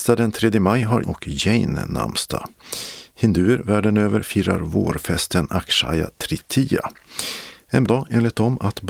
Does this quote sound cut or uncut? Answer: cut